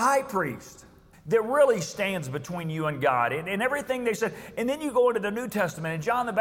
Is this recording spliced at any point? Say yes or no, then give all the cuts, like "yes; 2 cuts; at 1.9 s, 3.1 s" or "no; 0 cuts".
yes; 1 cut; at 1.1 s